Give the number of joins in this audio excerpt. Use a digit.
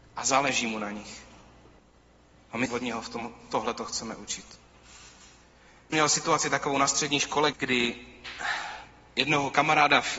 3